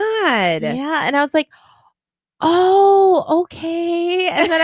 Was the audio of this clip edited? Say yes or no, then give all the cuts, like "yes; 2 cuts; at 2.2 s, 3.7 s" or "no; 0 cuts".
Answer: no; 0 cuts